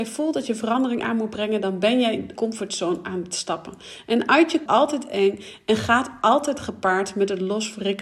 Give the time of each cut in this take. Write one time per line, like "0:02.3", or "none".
0:02.4
0:04.7